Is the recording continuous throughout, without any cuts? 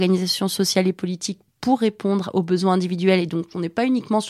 no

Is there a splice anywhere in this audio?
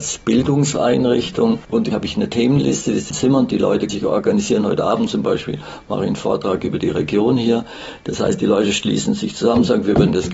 yes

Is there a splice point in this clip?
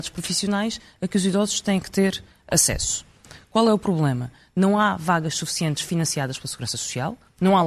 no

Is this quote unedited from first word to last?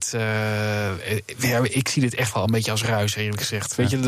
yes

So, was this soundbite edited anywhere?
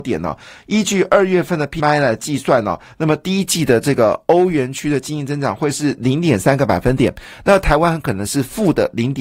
yes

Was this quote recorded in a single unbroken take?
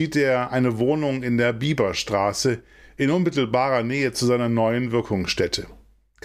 yes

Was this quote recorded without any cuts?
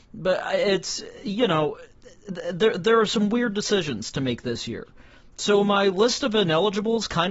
yes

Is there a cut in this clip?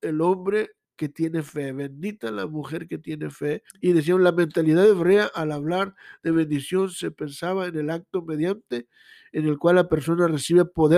yes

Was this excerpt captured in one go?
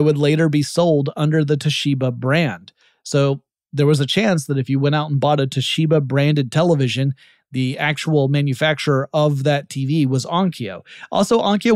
yes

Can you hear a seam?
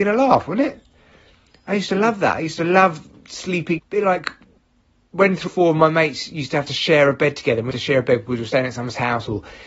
yes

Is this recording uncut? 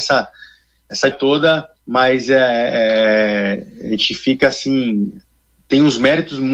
no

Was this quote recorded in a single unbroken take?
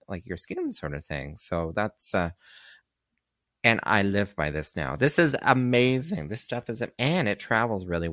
yes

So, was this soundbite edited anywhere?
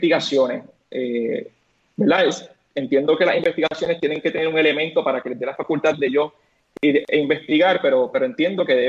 no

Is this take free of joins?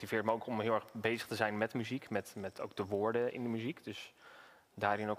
yes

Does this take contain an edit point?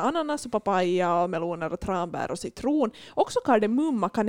no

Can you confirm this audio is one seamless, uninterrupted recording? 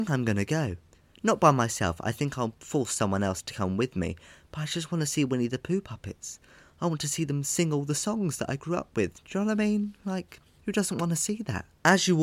yes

